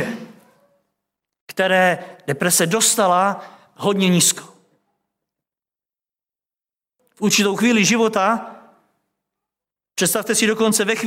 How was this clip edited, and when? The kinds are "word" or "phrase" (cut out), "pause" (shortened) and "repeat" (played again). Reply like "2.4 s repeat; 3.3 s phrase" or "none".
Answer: none